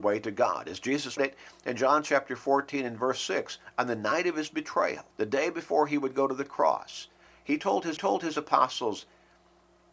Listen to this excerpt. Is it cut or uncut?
cut